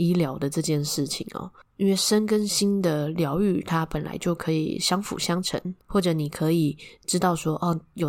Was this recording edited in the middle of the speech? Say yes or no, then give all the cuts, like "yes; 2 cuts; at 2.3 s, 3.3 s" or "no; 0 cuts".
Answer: yes; 1 cut; at 5.8 s